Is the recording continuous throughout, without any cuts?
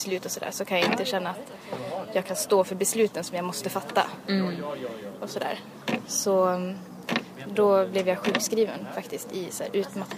yes; 0 cuts

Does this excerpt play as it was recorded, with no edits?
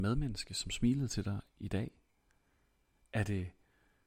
yes; 0 cuts

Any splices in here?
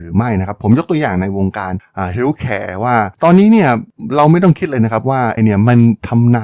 yes; 1 cut; at 5.4 s

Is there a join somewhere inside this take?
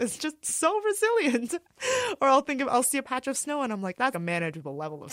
yes; 1 cut; at 4.1 s

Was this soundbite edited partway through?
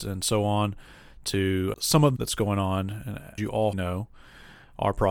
yes; 4 cuts; at 1.7 s, 2.2 s, 3.4 s, 3.7 s

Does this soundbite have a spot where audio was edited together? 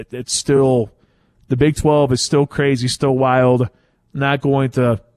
no; 0 cuts

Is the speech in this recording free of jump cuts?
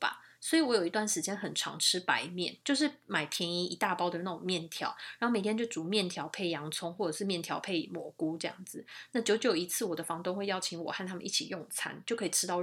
no; 1 cut; at 2.6 s

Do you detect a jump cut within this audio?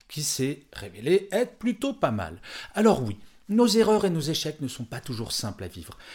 no; 0 cuts

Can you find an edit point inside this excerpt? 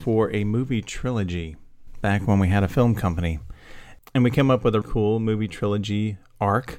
yes; 1 cut; at 4.8 s

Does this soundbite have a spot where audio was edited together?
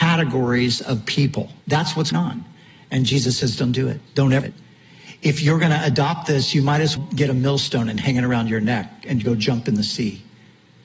yes; 5 cuts; at 1.6 s, 2.1 s, 4.1 s, 4.4 s, 7.0 s

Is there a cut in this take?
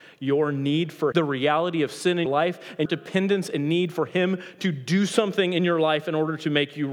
yes; 3 cuts; at 1.1 s, 2.3 s, 2.9 s

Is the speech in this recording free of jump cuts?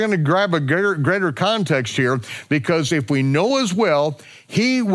yes; 0 cuts

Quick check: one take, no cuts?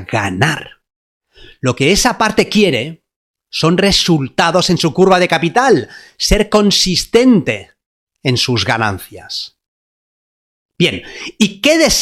yes; 0 cuts

